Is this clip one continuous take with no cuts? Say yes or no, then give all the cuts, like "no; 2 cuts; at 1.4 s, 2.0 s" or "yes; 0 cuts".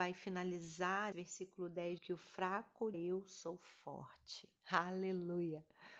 no; 4 cuts; at 1.1 s, 2.0 s, 2.9 s, 4.6 s